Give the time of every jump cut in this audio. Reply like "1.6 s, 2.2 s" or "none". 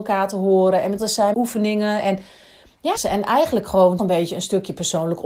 1.0 s, 1.3 s, 3.0 s, 4.0 s